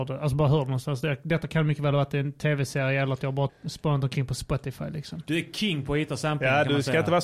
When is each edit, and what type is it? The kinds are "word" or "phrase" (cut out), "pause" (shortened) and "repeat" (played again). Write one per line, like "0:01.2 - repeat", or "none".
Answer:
0:03.5 - word

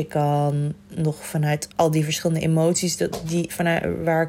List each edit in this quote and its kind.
0:01.7 - pause

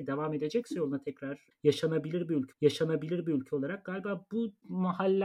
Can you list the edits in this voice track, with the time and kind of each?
0:02.5 - repeat

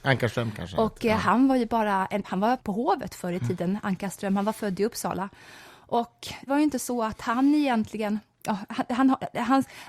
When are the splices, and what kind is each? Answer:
0:02.2 - word
0:02.6 - word
0:06.5 - word

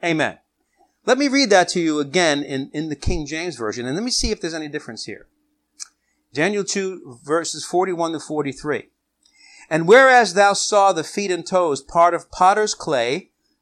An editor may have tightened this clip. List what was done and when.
none

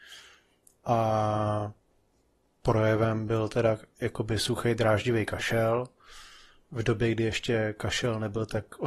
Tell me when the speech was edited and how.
none

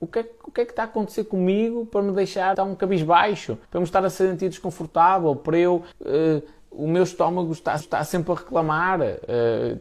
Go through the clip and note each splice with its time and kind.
0:02.5 - word
0:03.6 - pause
0:05.9 - pause
0:07.8 - repeat

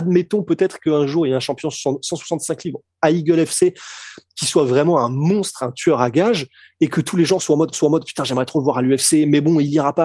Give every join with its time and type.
0:07.7 - repeat

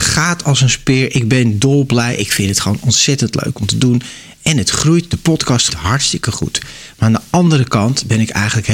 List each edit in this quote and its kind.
0:05.7 - word

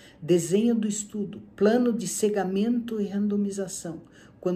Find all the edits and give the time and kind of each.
none

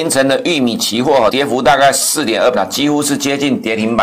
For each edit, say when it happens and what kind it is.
0:01.3 - word
0:02.5 - word

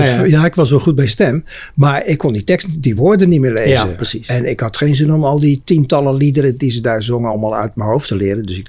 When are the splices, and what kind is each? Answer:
none

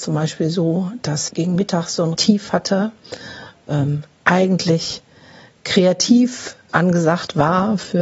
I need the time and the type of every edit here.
0:01.3 - word
0:02.1 - word
0:03.6 - word
0:06.7 - word

